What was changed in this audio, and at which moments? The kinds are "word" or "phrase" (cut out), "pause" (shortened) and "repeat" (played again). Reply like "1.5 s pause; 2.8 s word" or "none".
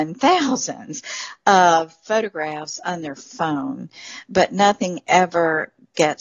none